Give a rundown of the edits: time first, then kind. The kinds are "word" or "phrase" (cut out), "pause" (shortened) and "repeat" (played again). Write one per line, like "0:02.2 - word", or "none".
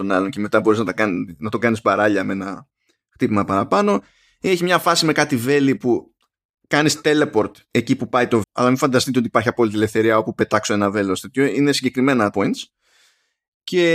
0:08.4 - word
0:12.3 - word